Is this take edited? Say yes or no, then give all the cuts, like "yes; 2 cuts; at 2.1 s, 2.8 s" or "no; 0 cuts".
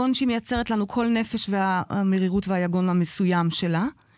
no; 0 cuts